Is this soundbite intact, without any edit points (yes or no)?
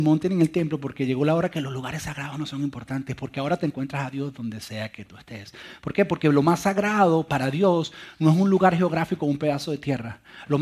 yes